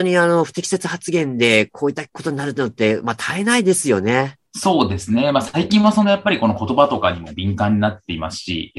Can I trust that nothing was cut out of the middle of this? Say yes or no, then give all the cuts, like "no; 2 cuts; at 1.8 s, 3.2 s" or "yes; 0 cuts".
no; 2 cuts; at 2.1 s, 4.5 s